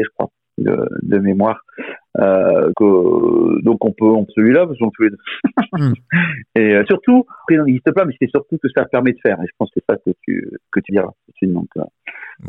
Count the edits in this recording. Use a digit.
8